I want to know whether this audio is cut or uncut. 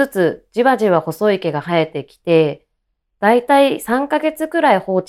uncut